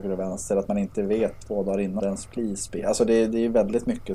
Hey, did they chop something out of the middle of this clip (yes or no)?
yes